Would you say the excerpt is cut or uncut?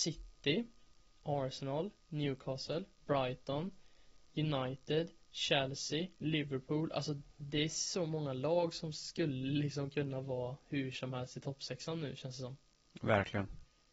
cut